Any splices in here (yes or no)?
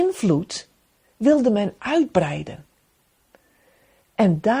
no